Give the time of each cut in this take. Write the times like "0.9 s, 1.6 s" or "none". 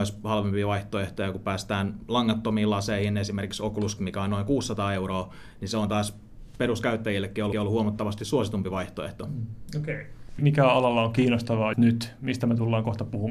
4.0 s, 7.5 s, 11.7 s